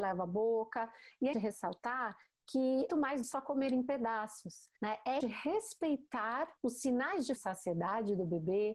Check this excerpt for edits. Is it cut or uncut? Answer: cut